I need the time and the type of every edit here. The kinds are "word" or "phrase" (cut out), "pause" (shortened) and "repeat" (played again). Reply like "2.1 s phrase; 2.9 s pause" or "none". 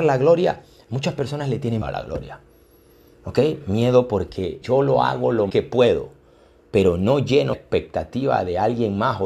1.8 s word; 4.6 s word; 5.5 s word; 7.5 s word